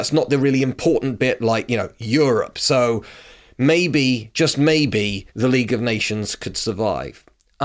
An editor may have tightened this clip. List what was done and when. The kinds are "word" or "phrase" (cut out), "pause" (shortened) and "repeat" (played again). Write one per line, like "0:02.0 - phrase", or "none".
0:05.3 - pause